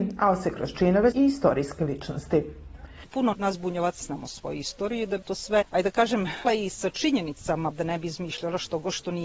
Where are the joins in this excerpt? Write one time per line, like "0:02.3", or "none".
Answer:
0:01.1
0:03.3
0:04.0
0:05.2
0:05.6
0:06.4
0:07.7